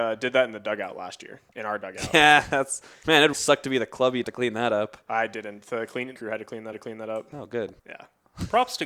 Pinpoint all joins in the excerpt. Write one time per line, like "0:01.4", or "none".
0:01.5
0:03.3
0:04.2
0:06.2
0:06.7
0:07.8